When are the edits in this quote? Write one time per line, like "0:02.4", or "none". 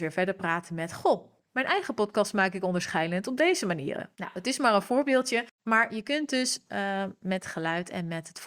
0:04.1
0:05.5